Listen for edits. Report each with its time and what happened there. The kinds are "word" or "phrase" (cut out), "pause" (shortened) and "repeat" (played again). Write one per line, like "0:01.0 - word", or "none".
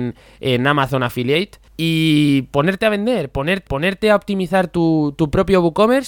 0:01.7 - pause
0:03.7 - repeat